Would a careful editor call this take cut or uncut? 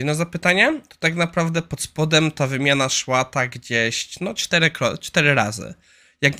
uncut